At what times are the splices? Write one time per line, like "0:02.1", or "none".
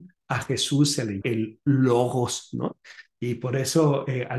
0:01.2